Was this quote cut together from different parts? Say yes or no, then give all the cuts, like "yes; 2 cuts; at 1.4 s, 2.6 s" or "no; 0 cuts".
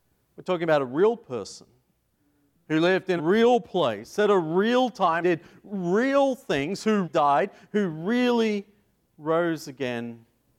yes; 3 cuts; at 3.2 s, 5.2 s, 7.0 s